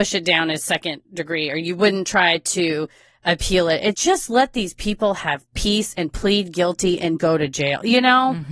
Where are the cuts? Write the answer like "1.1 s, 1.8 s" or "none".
3.9 s, 7.2 s